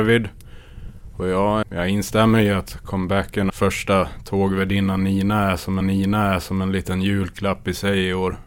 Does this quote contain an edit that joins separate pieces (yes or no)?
yes